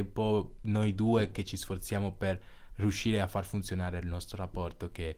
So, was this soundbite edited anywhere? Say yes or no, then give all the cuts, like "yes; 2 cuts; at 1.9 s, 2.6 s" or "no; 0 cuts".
no; 0 cuts